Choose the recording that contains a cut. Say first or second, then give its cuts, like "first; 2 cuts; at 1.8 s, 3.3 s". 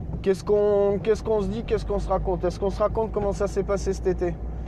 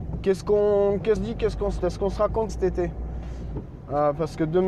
second; 3 cuts; at 1.2 s, 1.8 s, 2.5 s